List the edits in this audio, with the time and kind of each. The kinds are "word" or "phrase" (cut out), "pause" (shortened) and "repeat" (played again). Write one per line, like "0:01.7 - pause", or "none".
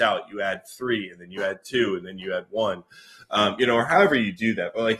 none